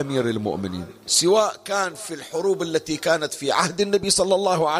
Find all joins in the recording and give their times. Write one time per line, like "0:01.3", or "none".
none